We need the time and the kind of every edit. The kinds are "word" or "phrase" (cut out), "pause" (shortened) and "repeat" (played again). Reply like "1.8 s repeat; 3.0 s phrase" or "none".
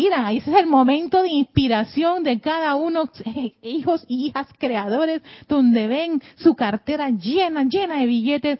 none